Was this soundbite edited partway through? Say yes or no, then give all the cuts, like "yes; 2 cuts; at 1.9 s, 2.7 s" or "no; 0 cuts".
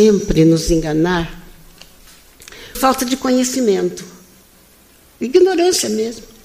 yes; 1 cut; at 2.7 s